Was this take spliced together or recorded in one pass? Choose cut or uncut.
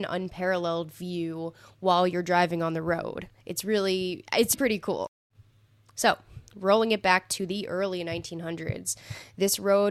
cut